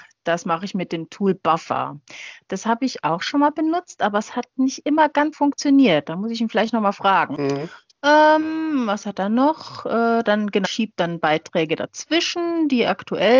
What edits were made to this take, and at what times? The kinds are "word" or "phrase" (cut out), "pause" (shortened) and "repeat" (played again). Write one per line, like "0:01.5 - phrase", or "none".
0:05.3 - word
0:10.6 - word